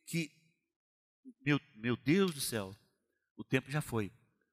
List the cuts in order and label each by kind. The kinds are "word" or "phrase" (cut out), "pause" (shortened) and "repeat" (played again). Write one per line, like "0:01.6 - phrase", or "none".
none